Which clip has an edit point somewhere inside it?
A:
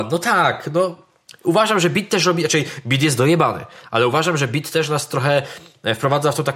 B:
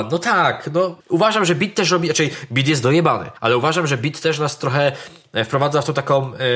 B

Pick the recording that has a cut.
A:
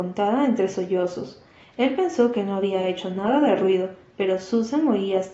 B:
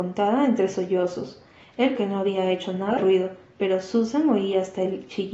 B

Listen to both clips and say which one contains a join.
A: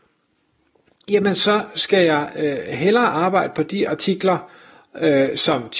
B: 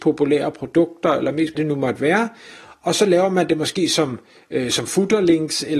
B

